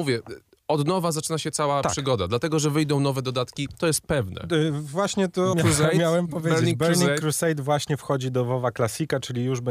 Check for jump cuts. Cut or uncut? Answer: cut